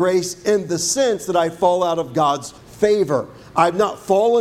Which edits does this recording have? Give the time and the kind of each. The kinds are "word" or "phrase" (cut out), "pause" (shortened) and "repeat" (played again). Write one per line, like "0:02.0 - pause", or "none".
0:02.6 - pause